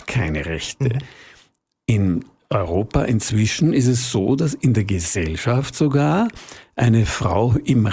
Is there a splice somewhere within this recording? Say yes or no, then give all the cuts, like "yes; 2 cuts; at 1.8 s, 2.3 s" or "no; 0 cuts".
no; 0 cuts